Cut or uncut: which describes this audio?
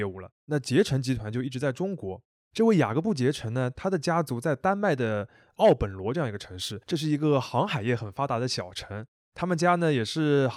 cut